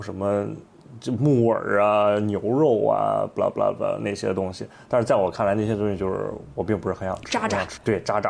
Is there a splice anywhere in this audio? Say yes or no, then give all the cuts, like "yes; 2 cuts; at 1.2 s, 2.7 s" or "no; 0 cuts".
no; 0 cuts